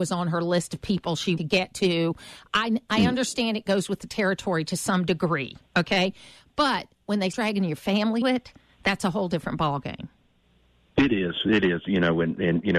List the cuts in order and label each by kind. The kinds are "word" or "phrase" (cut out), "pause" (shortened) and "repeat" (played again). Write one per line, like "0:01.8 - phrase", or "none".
0:01.4 - phrase
0:07.3 - word
0:08.2 - word